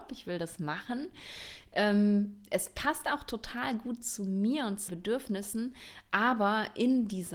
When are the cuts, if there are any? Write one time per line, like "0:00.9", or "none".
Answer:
0:04.9